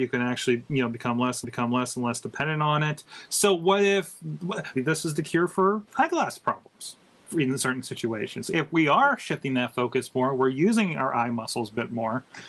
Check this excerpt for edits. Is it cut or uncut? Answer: cut